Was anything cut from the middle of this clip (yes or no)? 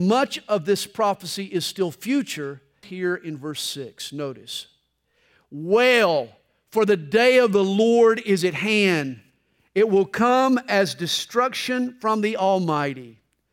yes